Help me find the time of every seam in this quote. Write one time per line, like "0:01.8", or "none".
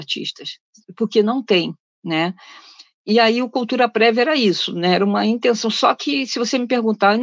none